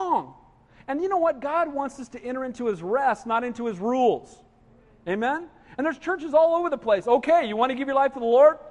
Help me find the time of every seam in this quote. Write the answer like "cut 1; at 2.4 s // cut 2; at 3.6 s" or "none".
none